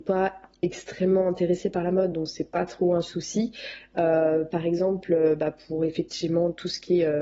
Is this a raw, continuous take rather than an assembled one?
yes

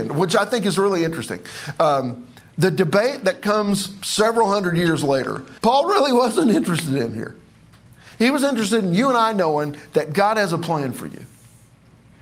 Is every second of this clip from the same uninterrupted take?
no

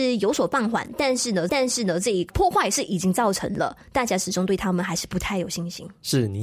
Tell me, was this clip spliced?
yes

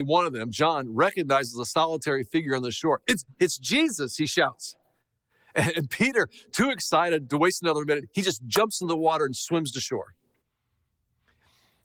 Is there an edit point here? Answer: no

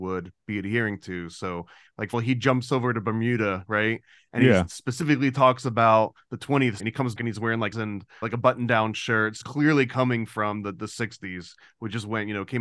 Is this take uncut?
no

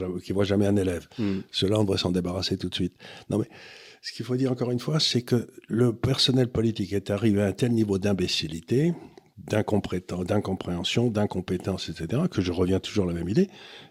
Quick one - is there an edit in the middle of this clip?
no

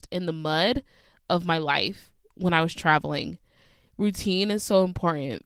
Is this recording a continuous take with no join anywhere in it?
yes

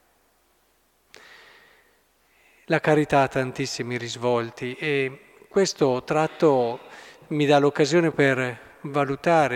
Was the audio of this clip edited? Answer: yes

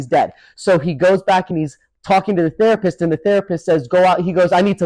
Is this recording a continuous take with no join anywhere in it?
yes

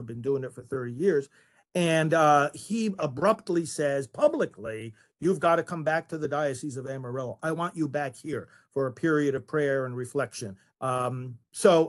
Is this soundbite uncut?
yes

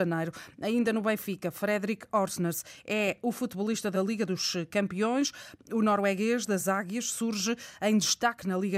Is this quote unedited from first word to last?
no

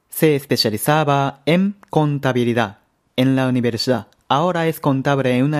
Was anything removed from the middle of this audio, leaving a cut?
no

